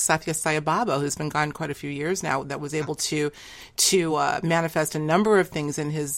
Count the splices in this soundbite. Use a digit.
0